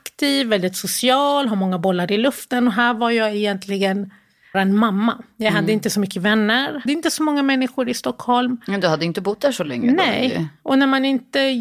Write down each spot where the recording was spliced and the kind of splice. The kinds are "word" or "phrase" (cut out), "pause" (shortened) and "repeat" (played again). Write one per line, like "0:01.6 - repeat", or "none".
0:04.5 - word
0:06.9 - word